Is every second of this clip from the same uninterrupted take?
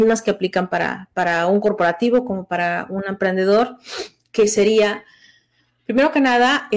yes; 0 cuts

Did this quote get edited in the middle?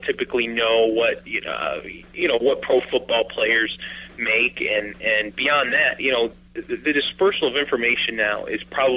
no; 0 cuts

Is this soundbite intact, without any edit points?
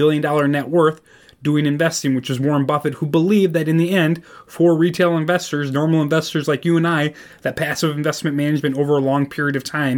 yes; 0 cuts

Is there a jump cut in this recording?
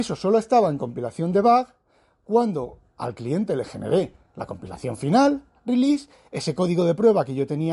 no; 0 cuts

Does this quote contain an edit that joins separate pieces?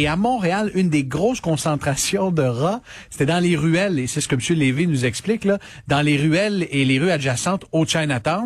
no; 0 cuts

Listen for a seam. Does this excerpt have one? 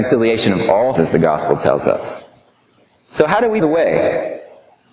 yes; 3 cuts; at 1.0 s, 2.8 s, 3.6 s

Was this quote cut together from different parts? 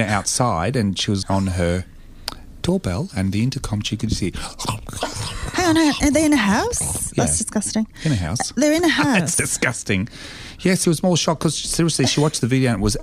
yes; 2 cuts; at 1.2 s, 10.8 s

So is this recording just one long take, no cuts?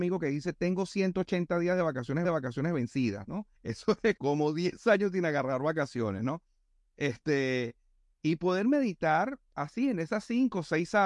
no; 3 cuts; at 2.2 s, 3.5 s, 4.2 s

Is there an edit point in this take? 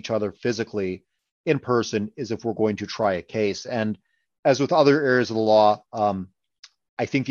no; 0 cuts

